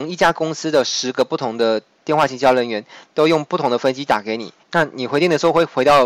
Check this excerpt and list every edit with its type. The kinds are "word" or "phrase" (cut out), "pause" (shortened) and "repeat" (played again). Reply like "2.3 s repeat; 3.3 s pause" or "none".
4.6 s pause